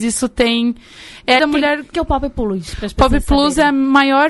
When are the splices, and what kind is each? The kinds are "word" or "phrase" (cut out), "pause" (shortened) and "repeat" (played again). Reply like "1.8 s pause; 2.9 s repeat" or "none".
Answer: 1.4 s phrase; 1.9 s word